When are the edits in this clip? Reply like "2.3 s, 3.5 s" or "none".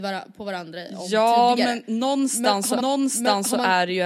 2.8 s